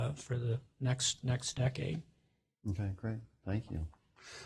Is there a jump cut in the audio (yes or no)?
no